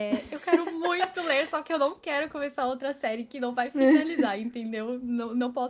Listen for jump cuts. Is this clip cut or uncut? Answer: uncut